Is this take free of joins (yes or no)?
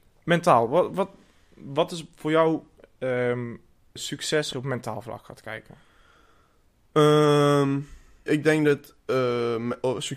no